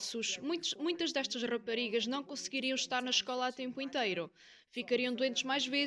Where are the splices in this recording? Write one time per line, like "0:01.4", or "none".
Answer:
none